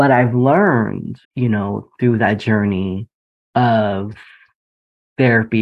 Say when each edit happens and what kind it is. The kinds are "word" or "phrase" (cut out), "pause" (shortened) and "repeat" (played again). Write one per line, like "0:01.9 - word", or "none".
0:01.2 - pause
0:03.3 - pause

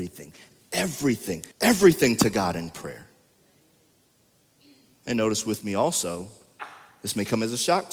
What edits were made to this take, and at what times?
0:01.5 - pause

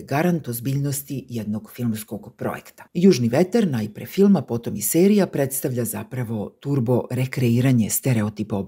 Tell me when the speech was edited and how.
0:02.9 - pause

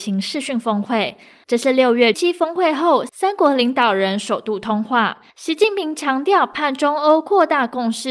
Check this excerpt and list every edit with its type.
0:02.1 - word
0:05.3 - pause

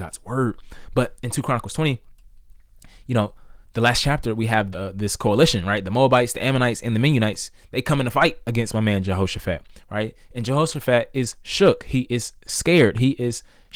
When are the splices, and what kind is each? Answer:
0:04.7 - phrase

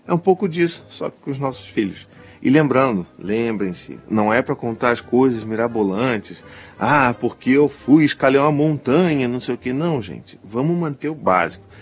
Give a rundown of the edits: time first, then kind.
none

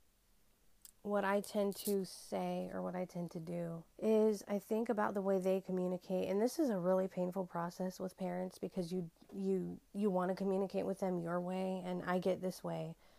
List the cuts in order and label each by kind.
0:00.9 - pause
0:03.9 - pause
0:09.9 - pause

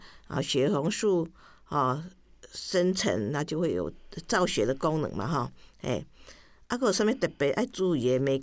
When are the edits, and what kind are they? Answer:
none

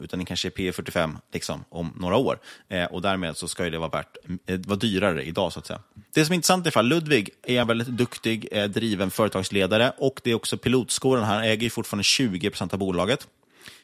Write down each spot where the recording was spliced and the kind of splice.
0:07.6 - phrase

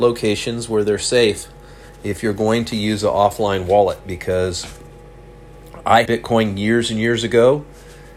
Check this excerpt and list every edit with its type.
0:06.1 - word

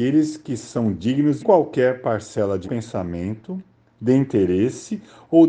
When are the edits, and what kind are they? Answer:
0:01.4 - phrase
0:02.6 - word

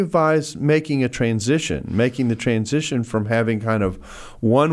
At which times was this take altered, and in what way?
none

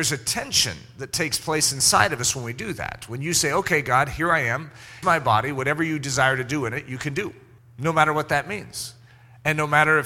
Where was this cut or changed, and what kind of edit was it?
0:05.0 - word
0:07.6 - pause

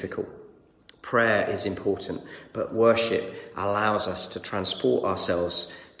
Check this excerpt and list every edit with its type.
none

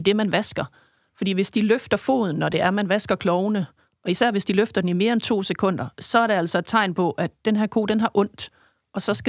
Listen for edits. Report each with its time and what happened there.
none

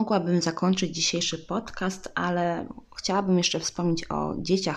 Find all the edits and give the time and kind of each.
none

